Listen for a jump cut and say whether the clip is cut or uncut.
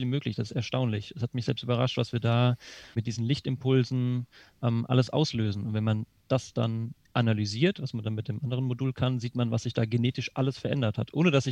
uncut